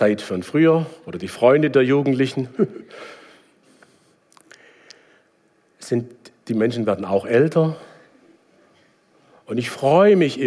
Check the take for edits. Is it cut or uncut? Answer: uncut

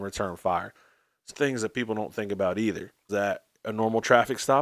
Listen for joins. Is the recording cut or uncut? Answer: cut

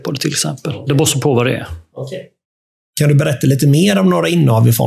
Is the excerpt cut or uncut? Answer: uncut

